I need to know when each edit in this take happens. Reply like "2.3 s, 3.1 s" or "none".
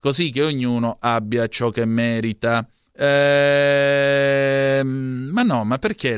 2.9 s